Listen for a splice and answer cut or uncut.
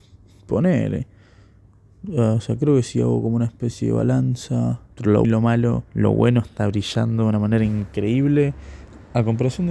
cut